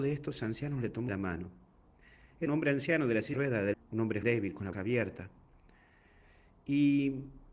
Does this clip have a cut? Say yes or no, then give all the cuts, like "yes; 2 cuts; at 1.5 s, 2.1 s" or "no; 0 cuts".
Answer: yes; 6 cuts; at 1.1 s, 2.5 s, 3.3 s, 3.7 s, 4.2 s, 4.7 s